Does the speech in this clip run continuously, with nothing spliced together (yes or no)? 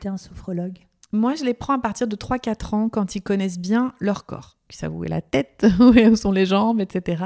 yes